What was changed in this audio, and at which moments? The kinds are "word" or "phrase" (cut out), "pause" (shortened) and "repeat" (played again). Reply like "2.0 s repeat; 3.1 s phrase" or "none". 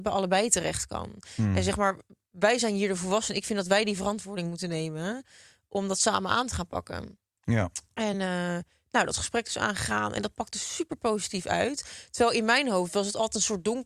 none